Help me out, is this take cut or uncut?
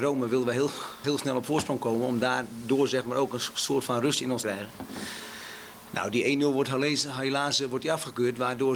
cut